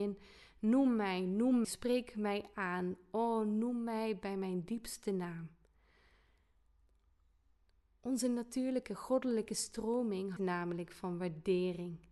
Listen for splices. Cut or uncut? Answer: cut